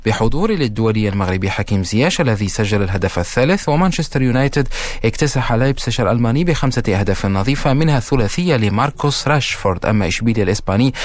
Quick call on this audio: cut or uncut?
uncut